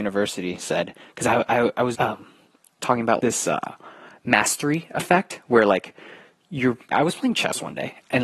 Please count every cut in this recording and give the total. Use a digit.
3